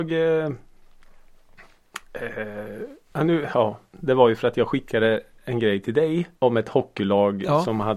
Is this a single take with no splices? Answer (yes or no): no